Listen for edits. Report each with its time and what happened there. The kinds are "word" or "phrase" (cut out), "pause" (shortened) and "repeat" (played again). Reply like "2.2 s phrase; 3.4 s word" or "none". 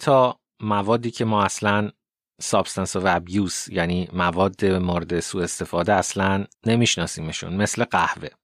6.5 s pause